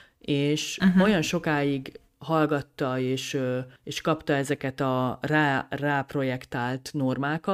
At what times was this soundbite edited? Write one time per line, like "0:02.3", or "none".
0:03.8